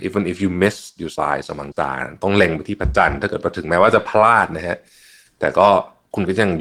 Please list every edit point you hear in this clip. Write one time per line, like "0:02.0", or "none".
0:01.2
0:01.7